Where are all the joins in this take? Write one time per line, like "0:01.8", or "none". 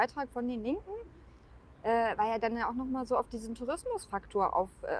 none